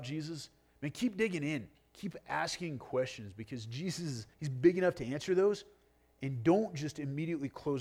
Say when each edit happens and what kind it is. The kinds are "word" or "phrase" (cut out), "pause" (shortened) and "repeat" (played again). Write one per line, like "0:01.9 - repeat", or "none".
0:04.3 - pause